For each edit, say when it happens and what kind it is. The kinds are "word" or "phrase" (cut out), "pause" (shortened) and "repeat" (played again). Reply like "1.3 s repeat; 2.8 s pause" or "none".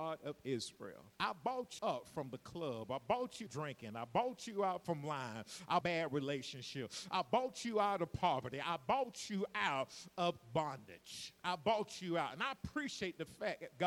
1.1 s pause; 1.8 s word; 3.5 s phrase; 5.8 s phrase; 11.4 s pause